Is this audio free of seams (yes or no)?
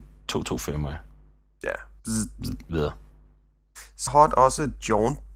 no